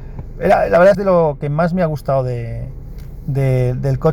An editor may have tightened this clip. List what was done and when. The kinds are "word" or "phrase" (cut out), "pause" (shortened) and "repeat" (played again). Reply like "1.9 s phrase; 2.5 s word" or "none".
0.9 s phrase